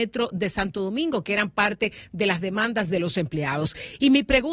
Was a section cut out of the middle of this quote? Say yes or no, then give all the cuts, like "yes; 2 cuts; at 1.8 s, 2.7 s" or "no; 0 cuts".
no; 0 cuts